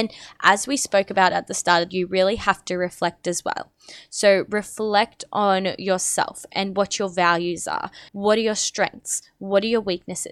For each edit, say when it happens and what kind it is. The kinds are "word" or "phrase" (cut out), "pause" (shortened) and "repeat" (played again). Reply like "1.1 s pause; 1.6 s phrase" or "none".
1.9 s phrase; 8.1 s pause